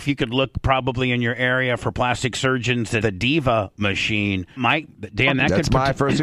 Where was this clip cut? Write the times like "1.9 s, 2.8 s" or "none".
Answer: 3.0 s, 4.6 s